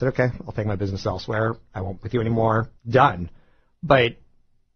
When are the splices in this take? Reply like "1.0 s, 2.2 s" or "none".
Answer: 2.0 s, 2.8 s